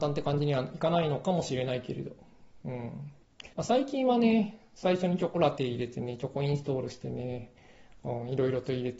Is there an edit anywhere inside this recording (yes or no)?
yes